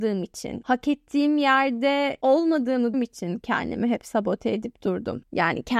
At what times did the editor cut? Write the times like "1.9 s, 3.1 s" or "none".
2.9 s

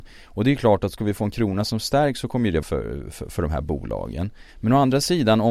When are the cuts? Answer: 2.6 s, 4.5 s

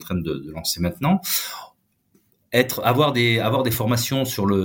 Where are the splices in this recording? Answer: none

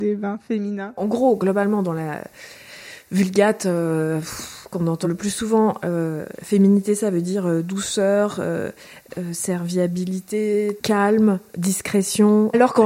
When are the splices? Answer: 5.0 s

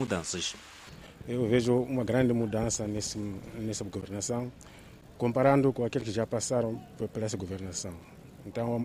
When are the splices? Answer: none

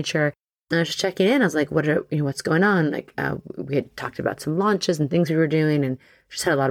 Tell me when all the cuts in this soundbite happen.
none

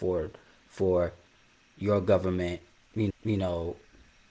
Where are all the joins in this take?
3.1 s

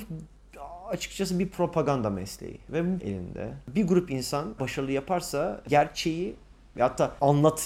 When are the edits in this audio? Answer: 3.0 s, 4.6 s

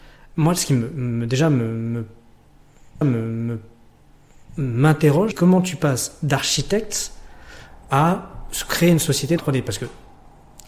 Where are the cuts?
3.0 s, 5.3 s, 9.4 s

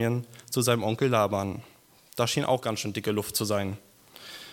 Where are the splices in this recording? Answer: none

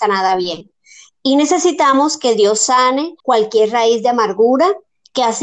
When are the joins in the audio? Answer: 3.2 s

